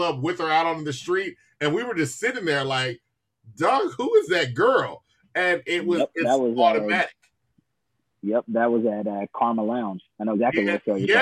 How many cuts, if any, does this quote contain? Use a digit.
0